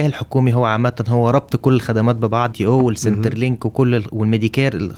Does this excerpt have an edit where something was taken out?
yes; 1 cut; at 2.5 s

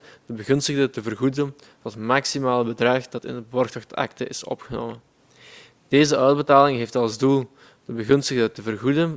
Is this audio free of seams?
yes; 0 cuts

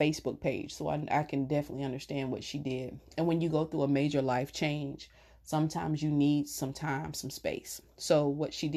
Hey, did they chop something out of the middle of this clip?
no; 0 cuts

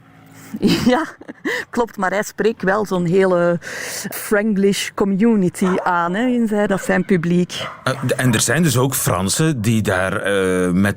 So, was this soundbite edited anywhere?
yes; 3 cuts; at 2.6 s, 4.1 s, 6.7 s

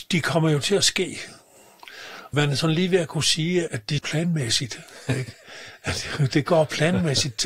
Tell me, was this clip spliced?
yes; 3 cuts; at 2.3 s, 3.7 s, 4.0 s

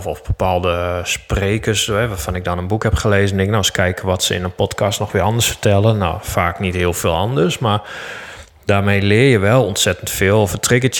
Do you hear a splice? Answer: no; 0 cuts

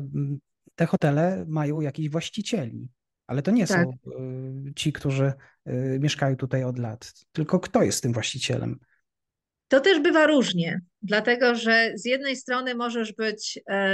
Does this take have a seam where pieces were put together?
no; 0 cuts

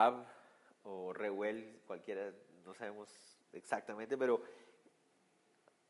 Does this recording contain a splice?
no; 0 cuts

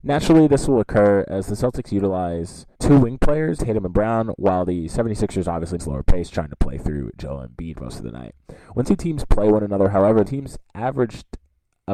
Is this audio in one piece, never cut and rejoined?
no; 5 cuts; at 2.7 s, 3.6 s, 5.8 s, 8.8 s, 10.2 s

